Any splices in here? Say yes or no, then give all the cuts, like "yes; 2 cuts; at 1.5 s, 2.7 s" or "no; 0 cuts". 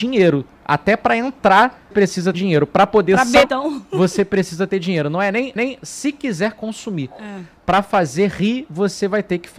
yes; 4 cuts; at 1.9 s, 2.3 s, 3.4 s, 5.6 s